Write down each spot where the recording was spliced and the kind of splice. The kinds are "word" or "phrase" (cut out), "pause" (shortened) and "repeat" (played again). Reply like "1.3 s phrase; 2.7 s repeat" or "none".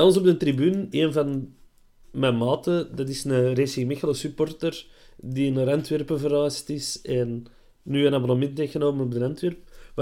0.9 s word

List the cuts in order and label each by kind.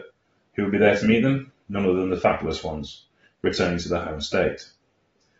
none

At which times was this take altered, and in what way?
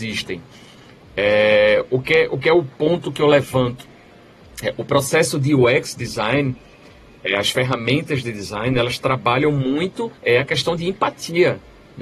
10.2 s pause

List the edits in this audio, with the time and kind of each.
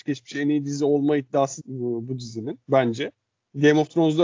1.6 s phrase; 2.6 s pause

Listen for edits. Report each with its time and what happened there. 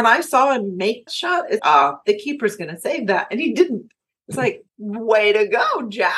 1.1 s word; 1.6 s word; 4.7 s pause

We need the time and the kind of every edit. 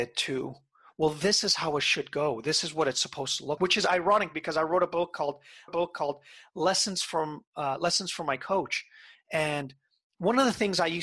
3.6 s word; 5.7 s repeat

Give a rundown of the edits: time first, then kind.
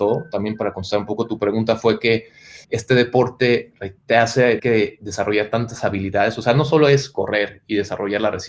2.6 s word; 4.0 s pause; 4.6 s word

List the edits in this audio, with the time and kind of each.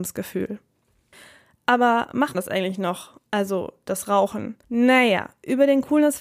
2.3 s word; 4.6 s pause

